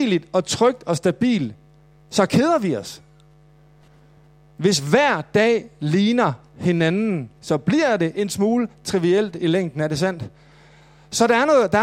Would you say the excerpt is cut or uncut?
uncut